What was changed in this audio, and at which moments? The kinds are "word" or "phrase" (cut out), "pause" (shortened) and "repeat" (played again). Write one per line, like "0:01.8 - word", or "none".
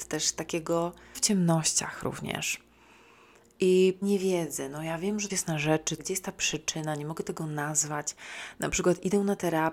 0:01.1 - word
0:04.0 - word
0:05.3 - word
0:06.0 - phrase